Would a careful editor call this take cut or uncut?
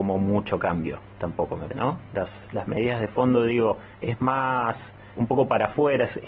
cut